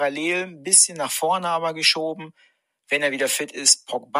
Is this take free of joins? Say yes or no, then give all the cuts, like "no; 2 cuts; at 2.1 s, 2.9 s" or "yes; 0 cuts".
yes; 0 cuts